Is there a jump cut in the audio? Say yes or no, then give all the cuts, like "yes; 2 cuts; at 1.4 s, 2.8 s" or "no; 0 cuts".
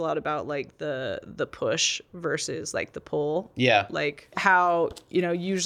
no; 0 cuts